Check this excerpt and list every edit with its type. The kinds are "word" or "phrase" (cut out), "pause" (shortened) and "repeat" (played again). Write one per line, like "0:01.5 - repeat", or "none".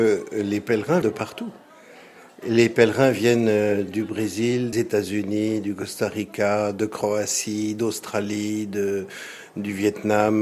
0:01.0 - word
0:04.7 - word